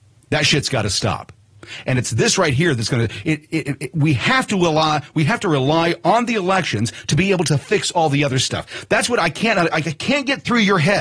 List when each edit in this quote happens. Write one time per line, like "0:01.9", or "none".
none